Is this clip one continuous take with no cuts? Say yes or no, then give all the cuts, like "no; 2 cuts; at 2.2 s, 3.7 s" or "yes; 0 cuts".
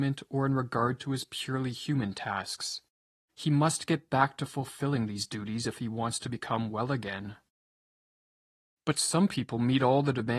yes; 0 cuts